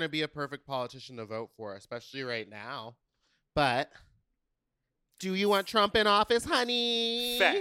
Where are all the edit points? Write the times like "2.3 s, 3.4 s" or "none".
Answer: none